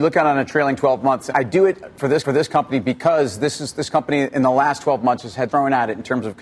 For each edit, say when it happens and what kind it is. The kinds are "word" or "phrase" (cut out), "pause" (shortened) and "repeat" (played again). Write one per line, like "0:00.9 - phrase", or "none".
0:01.3 - word
0:02.2 - repeat
0:05.5 - phrase

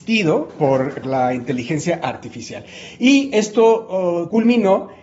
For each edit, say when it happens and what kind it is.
0:01.0 - word

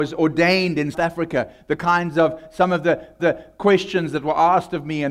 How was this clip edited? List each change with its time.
0:00.9 - word
0:03.2 - repeat

